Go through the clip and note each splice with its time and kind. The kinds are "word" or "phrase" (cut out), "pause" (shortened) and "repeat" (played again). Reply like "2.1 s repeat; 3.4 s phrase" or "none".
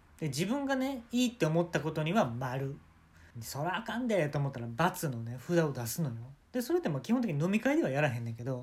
3.3 s pause; 6.4 s pause